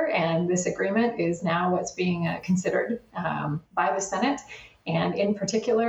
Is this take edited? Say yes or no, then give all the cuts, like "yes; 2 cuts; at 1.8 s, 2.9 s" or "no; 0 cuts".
no; 0 cuts